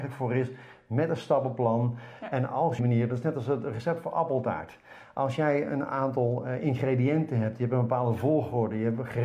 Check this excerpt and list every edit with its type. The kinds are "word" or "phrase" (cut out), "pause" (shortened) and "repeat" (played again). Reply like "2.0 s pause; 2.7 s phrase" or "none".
2.8 s phrase